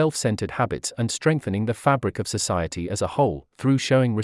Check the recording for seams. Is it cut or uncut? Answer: uncut